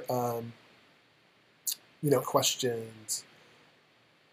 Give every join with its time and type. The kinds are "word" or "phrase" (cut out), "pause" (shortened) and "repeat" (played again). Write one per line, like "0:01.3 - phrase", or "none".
0:02.2 - word